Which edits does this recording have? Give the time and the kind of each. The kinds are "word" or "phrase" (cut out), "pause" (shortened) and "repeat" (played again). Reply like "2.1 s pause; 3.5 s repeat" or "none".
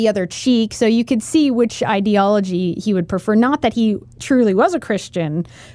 none